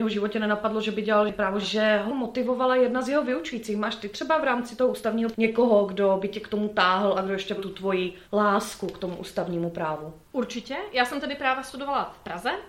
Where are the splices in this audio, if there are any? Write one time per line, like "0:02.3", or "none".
0:01.6
0:02.1
0:05.3
0:07.6
0:08.2
0:10.2